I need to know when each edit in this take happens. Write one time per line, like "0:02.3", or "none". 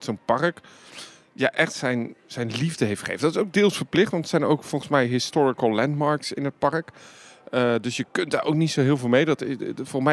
none